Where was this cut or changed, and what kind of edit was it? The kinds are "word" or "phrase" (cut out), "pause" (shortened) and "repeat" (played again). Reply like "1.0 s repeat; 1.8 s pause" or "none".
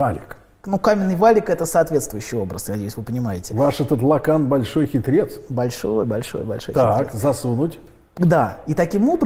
none